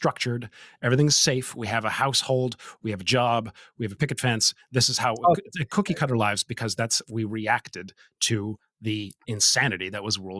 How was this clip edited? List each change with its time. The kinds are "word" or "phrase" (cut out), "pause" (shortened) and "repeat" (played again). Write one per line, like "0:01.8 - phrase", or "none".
none